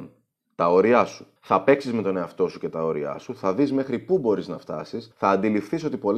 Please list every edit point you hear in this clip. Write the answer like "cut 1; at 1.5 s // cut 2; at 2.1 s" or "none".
cut 1; at 1.4 s // cut 2; at 5.1 s